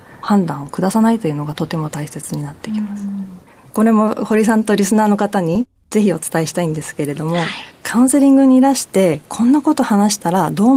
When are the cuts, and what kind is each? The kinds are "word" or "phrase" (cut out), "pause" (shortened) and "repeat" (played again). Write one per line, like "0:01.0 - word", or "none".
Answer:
0:03.5 - pause